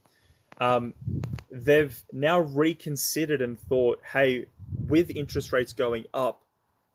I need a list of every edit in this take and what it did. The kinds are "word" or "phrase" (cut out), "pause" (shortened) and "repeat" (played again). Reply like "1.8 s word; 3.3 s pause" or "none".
none